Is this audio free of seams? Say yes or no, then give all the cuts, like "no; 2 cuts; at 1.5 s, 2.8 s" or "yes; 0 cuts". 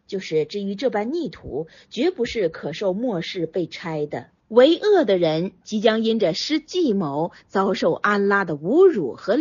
no; 1 cut; at 4.4 s